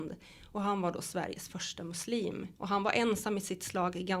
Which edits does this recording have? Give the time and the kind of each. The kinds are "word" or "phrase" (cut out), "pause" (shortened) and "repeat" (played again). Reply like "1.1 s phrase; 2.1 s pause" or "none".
2.6 s pause